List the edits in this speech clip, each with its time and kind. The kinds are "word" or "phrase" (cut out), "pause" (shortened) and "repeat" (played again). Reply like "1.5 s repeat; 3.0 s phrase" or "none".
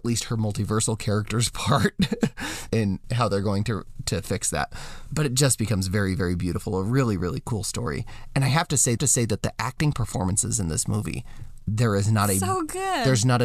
2.7 s word; 9.0 s repeat